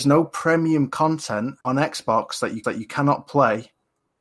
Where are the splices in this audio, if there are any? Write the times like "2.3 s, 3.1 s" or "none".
1.6 s, 2.6 s